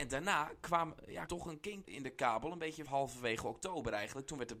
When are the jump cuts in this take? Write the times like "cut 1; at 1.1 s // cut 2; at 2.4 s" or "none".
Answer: cut 1; at 1.3 s // cut 2; at 1.8 s // cut 3; at 2.9 s